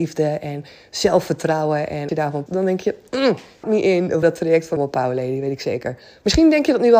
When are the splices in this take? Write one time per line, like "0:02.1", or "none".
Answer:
0:02.1
0:02.5
0:03.6
0:04.2
0:04.8